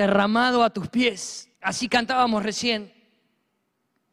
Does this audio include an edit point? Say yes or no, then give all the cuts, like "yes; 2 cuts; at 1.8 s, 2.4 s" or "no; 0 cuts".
yes; 1 cut; at 1.5 s